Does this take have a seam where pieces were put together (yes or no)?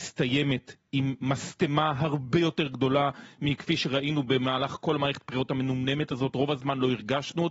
no